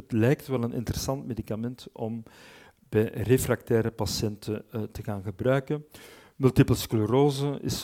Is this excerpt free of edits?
yes; 0 cuts

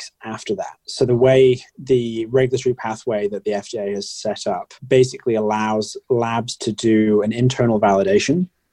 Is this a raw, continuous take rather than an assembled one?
no; 2 cuts; at 1.7 s, 4.8 s

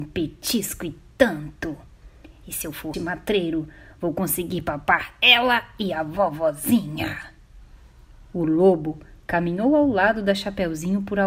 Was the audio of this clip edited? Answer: yes; 1 cut; at 2.9 s

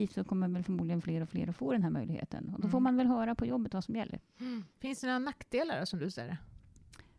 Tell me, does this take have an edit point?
yes; 1 cut; at 4.7 s

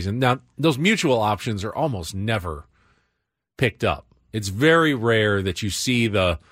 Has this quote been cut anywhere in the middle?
no; 0 cuts

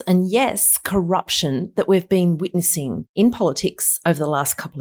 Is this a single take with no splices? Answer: yes; 0 cuts

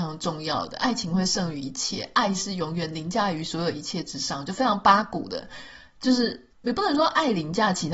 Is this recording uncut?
no; 1 cut; at 6.5 s

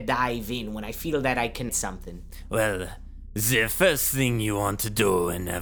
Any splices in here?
yes; 1 cut; at 1.7 s

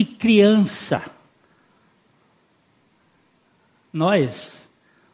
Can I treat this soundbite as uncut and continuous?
yes; 0 cuts

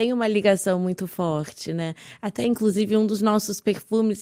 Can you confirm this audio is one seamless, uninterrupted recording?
yes; 0 cuts

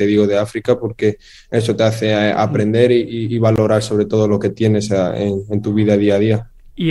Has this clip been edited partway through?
no; 0 cuts

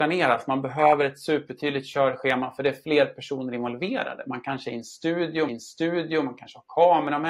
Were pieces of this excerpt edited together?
yes; 1 cut; at 5.5 s

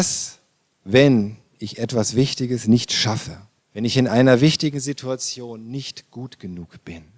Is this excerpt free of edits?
no; 1 cut; at 3.6 s

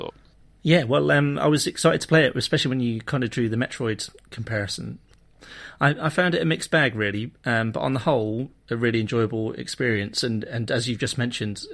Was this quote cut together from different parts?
yes; 1 cut; at 8.6 s

